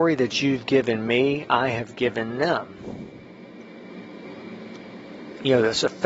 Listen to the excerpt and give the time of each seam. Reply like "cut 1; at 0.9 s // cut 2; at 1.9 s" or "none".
none